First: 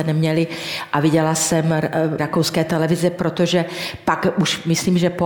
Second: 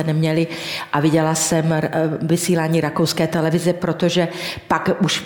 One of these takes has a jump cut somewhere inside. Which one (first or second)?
first